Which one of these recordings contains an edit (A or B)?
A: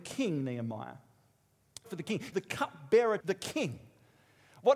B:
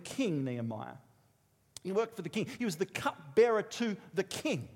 A